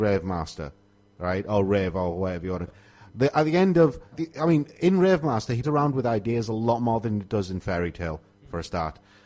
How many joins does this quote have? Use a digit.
3